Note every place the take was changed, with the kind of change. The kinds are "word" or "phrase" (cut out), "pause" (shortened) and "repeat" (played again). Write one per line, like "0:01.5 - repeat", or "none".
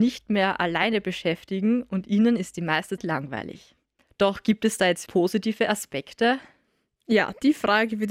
0:03.0 - word
0:05.1 - word